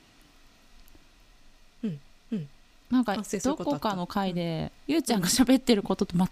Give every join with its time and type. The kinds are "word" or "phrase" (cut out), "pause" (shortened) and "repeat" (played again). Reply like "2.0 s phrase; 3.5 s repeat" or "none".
2.1 s repeat; 4.8 s pause